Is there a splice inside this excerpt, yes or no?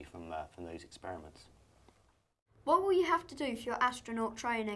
no